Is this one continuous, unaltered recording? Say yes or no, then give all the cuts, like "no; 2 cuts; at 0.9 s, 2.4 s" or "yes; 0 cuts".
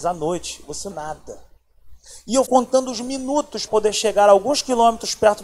no; 3 cuts; at 0.9 s, 2.5 s, 3.7 s